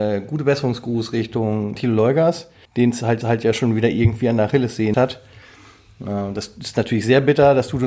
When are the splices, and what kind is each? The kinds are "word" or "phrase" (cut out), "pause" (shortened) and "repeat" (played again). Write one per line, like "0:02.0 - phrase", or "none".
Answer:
0:01.8 - word
0:02.6 - pause
0:03.2 - repeat
0:04.9 - word